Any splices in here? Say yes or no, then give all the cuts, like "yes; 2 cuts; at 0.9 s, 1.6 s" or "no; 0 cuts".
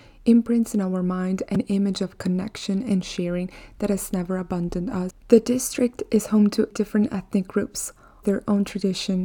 yes; 3 cuts; at 5.2 s, 6.7 s, 8.2 s